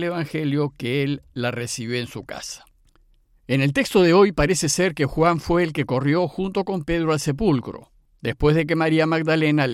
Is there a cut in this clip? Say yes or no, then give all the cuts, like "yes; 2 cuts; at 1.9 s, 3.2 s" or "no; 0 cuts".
no; 0 cuts